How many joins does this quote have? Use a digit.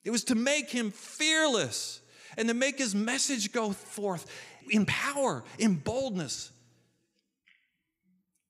1